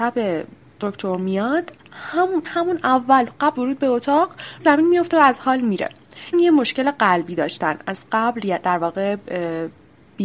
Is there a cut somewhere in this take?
yes; 4 cuts; at 2.4 s, 3.5 s, 4.6 s, 6.3 s

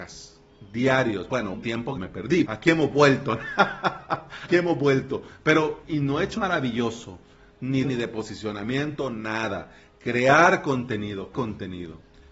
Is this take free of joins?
no; 8 cuts; at 1.5 s, 2.0 s, 2.4 s, 4.5 s, 5.8 s, 6.4 s, 7.8 s, 11.3 s

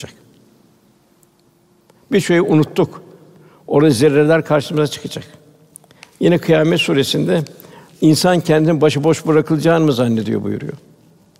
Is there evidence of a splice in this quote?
no; 0 cuts

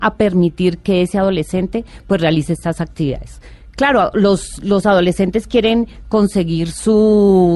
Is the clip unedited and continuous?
yes; 0 cuts

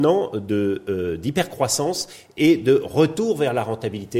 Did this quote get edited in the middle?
no; 0 cuts

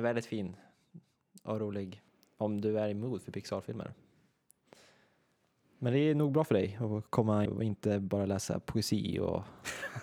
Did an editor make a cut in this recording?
yes; 1 cut; at 7.5 s

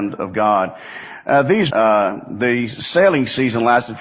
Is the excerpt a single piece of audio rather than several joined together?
no; 1 cut; at 1.7 s

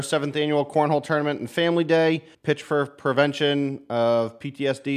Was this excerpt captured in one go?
no; 1 cut; at 2.3 s

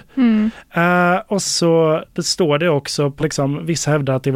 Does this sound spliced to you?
yes; 2 cuts; at 1.4 s, 3.2 s

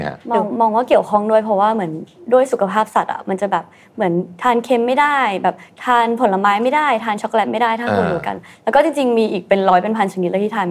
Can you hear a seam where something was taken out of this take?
no; 0 cuts

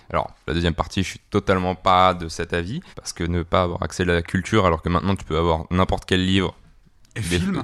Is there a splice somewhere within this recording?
yes; 2 cuts; at 1.3 s, 2.9 s

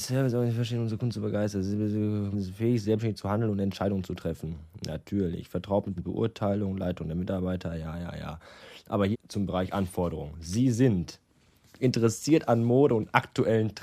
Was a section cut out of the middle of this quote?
yes; 3 cuts; at 2.3 s, 6.0 s, 9.1 s

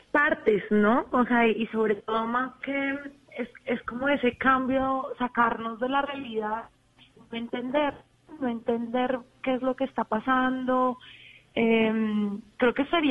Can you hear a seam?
no; 0 cuts

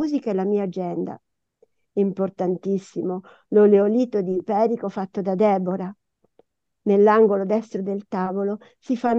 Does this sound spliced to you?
no; 0 cuts

